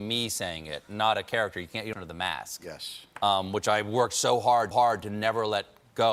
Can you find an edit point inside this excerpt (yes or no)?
yes